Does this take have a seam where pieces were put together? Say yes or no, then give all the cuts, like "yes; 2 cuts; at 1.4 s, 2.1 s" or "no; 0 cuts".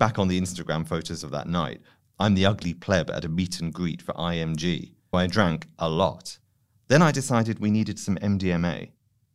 yes; 1 cut; at 5.1 s